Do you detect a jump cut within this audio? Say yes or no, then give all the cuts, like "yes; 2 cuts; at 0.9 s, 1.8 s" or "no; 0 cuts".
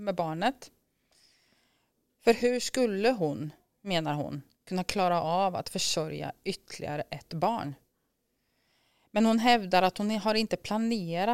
no; 0 cuts